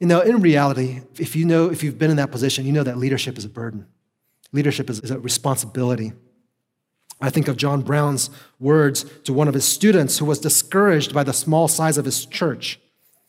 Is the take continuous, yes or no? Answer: no